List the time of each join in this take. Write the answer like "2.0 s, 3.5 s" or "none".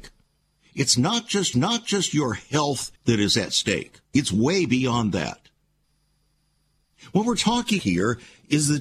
1.5 s, 3.0 s, 4.0 s, 7.8 s